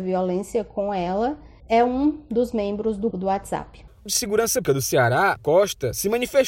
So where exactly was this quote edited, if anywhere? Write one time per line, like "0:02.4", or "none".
0:01.6
0:03.1
0:04.1
0:04.6
0:05.4